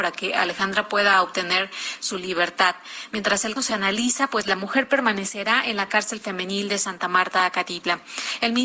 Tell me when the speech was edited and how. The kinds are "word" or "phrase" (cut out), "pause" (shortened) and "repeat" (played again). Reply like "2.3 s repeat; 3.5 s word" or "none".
3.6 s word